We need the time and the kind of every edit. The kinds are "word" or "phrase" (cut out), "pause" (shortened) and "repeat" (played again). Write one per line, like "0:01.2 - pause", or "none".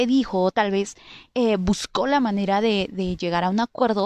none